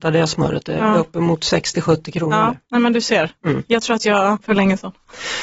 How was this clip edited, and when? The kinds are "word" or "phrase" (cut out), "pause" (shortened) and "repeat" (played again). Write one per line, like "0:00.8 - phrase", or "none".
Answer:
0:04.4 - word